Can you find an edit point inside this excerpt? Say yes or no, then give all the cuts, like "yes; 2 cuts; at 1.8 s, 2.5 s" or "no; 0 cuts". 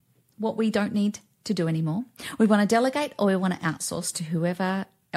no; 0 cuts